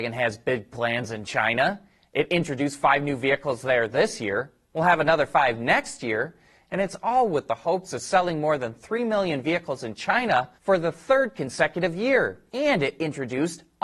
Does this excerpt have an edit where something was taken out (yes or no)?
yes